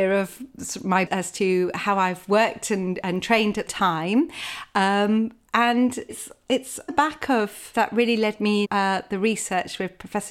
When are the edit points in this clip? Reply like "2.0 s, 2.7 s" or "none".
1.1 s, 3.0 s, 3.7 s, 6.1 s, 6.9 s, 7.7 s, 8.6 s